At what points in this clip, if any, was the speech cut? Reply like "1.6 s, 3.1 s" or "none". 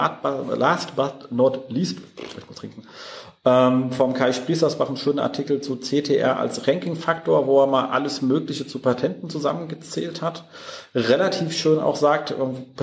2.5 s